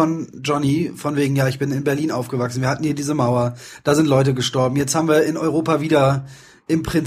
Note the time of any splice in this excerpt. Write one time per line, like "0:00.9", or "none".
none